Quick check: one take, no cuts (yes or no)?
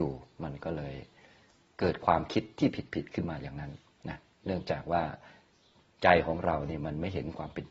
yes